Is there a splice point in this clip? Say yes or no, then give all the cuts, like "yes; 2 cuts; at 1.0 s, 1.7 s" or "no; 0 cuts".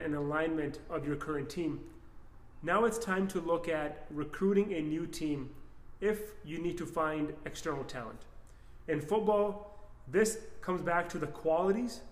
no; 0 cuts